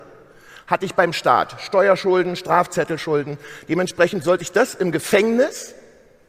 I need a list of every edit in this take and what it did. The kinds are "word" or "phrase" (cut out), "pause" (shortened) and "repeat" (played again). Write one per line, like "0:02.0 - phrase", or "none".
none